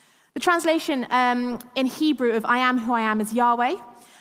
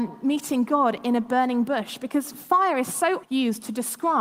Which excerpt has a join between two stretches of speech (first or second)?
second